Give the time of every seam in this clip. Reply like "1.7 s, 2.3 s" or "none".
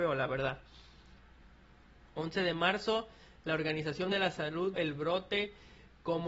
4.1 s, 4.7 s